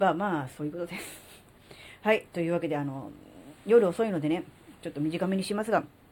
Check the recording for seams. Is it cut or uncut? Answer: uncut